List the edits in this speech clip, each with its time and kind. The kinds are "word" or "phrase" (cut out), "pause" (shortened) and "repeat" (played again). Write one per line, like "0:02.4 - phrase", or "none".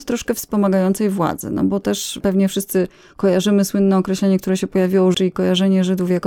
0:05.1 - word